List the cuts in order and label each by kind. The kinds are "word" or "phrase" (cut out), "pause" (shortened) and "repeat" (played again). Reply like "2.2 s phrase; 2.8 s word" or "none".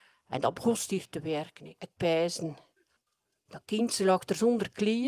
3.0 s pause